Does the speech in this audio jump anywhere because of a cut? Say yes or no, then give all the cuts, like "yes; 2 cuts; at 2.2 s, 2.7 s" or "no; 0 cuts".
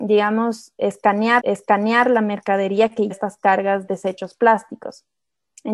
yes; 3 cuts; at 1.4 s, 3.1 s, 3.9 s